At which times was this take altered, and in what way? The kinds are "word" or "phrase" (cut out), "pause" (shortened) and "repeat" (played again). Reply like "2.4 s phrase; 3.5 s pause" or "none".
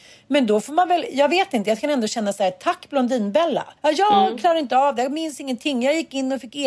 3.8 s pause